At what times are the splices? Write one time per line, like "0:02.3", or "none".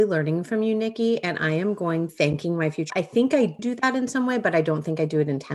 0:02.1
0:02.9
0:03.6